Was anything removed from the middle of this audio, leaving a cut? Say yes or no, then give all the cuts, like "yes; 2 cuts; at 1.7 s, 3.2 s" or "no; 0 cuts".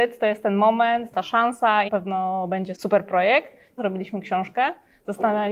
yes; 4 cuts; at 1.1 s, 1.9 s, 2.8 s, 3.8 s